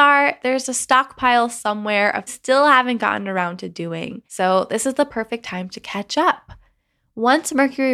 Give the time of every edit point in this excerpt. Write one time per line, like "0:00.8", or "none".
0:02.3
0:04.3